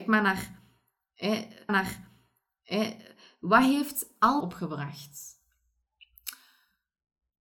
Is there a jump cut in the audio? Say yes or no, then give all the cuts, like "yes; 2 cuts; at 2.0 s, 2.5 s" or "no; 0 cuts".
yes; 2 cuts; at 1.7 s, 4.4 s